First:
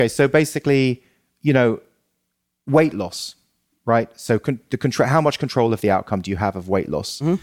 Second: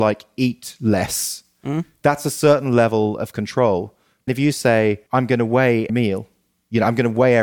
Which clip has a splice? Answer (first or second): second